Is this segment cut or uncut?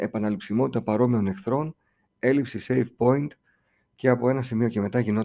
uncut